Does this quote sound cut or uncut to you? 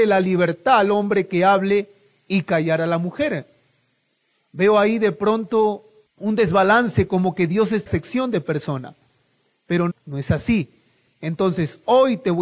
cut